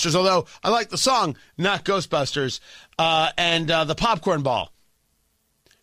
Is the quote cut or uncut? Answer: uncut